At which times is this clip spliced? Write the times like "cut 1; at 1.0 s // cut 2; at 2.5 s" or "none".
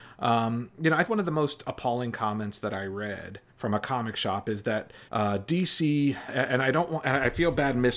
cut 1; at 1.1 s // cut 2; at 3.5 s // cut 3; at 5.1 s // cut 4; at 6.3 s